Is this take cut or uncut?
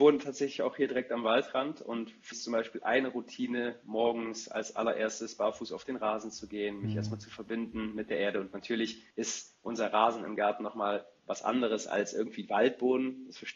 cut